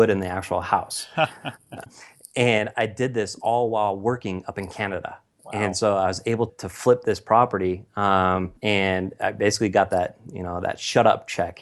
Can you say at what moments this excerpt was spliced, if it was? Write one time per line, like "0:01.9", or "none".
0:06.5
0:08.6